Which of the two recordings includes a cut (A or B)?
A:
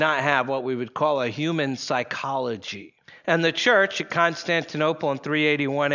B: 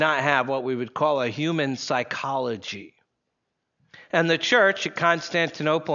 A